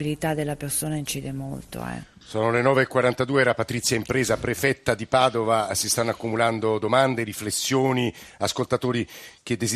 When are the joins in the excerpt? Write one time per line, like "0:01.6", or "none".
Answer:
0:02.2